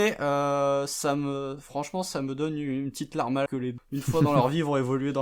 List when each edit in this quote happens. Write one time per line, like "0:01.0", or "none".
0:03.5
0:03.8